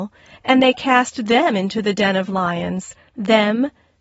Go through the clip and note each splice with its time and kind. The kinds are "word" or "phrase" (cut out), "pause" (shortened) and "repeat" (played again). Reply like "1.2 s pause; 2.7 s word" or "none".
none

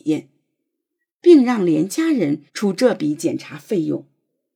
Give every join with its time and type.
2.5 s pause

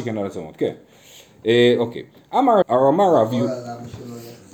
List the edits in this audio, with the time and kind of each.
2.6 s word

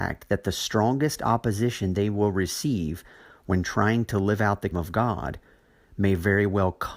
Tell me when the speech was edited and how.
4.7 s word

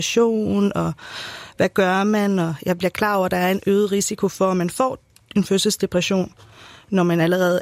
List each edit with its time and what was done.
none

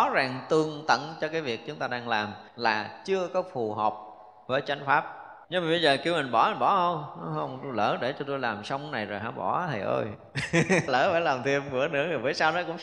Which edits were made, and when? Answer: 2.5 s pause; 5.4 s pause; 10.9 s word

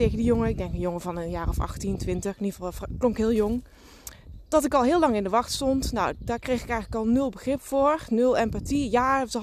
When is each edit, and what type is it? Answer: none

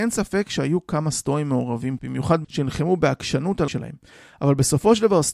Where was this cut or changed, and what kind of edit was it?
2.0 s word; 2.4 s word; 3.7 s word

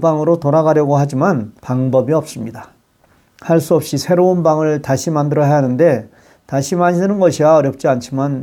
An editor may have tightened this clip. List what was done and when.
1.6 s pause

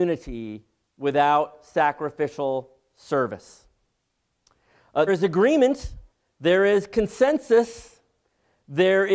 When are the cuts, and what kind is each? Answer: 5.1 s word; 6.1 s pause

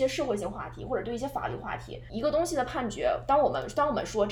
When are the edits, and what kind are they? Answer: 2.1 s word

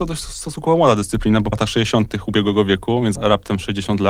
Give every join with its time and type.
1.5 s word; 3.2 s word

